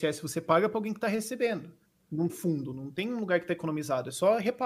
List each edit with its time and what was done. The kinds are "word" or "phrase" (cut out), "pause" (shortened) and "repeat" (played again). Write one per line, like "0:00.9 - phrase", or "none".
0:02.3 - word